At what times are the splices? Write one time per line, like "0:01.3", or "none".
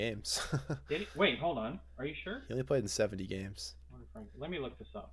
none